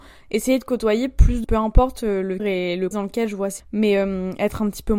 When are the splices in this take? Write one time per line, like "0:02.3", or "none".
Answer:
0:01.4
0:02.4
0:02.9
0:03.6